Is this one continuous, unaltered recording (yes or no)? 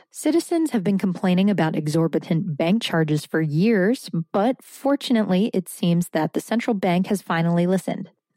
yes